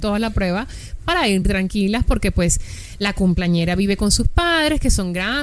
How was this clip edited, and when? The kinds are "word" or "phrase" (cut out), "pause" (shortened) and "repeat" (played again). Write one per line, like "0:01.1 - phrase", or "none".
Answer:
none

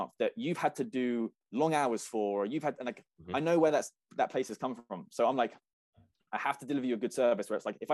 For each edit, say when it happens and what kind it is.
none

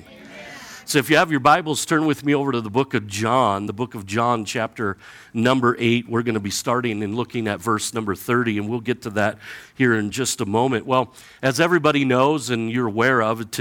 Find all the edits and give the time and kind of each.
none

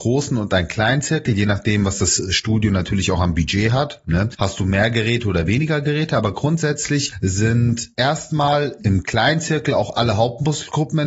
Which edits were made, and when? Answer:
0:08.8 - word

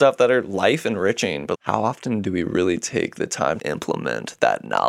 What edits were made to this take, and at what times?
0:01.5 - word
0:03.6 - word

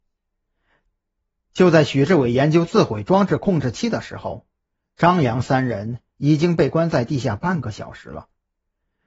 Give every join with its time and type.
none

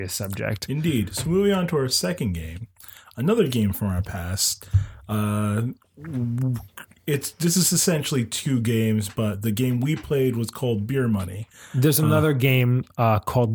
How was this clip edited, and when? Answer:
none

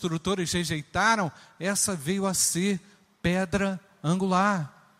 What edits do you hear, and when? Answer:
none

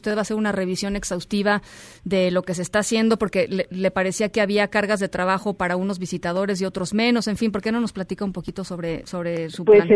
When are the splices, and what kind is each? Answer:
none

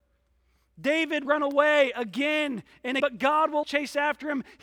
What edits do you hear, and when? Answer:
0:01.2 - word
0:03.0 - word
0:03.6 - word

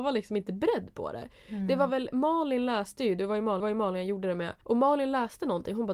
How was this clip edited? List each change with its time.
0:03.6 - repeat
0:04.6 - pause

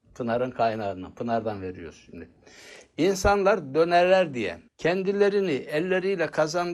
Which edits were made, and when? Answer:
0:04.7 - pause

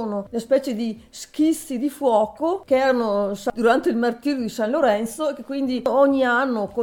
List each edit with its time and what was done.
none

